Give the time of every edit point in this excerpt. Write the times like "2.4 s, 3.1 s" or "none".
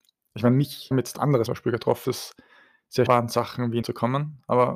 0.9 s, 1.5 s, 2.0 s, 3.1 s, 3.8 s